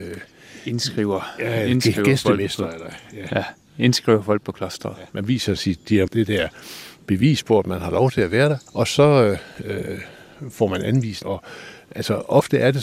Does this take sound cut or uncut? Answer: cut